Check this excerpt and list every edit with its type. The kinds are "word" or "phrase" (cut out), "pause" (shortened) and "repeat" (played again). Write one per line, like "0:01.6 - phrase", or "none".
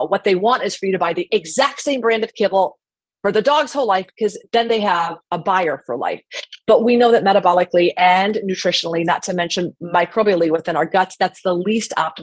0:05.2 - pause